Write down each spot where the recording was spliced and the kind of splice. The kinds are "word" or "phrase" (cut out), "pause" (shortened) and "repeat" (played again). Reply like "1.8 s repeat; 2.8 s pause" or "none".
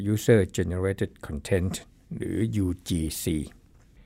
none